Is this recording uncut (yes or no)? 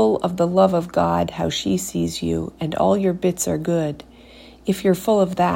yes